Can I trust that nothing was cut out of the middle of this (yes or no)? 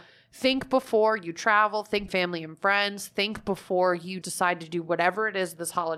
no